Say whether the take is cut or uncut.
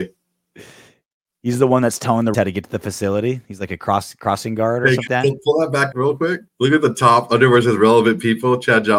cut